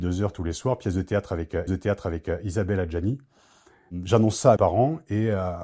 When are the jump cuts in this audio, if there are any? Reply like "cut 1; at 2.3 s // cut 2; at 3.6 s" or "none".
cut 1; at 1.7 s // cut 2; at 4.6 s